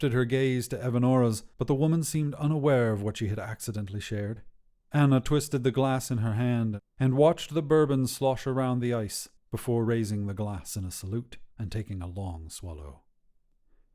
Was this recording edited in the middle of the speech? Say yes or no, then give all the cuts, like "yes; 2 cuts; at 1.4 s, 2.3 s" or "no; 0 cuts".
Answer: yes; 4 cuts; at 1.5 s, 4.8 s, 9.4 s, 11.5 s